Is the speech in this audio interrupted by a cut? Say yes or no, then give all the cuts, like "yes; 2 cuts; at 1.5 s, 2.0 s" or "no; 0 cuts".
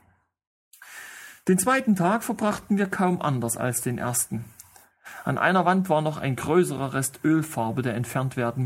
no; 0 cuts